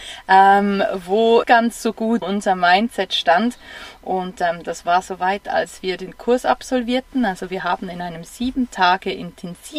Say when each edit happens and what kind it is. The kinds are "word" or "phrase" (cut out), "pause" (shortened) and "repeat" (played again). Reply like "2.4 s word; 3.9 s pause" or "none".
1.4 s phrase; 2.2 s word